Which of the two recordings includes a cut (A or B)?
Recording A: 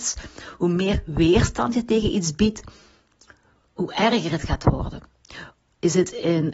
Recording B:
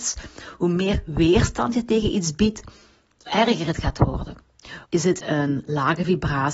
B